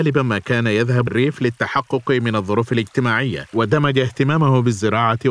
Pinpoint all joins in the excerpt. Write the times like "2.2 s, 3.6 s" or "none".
1.1 s, 3.5 s